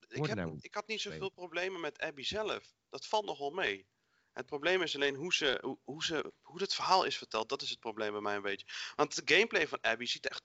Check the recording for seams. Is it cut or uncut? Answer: uncut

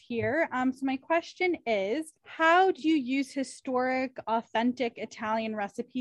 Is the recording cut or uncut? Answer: cut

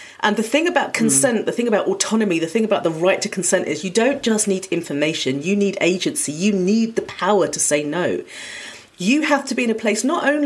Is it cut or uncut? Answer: uncut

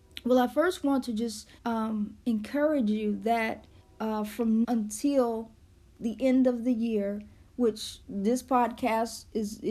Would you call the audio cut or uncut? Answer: cut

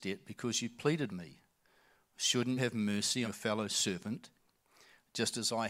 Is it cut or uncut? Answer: cut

